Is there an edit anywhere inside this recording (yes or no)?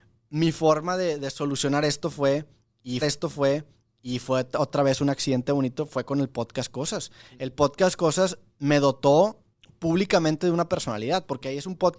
yes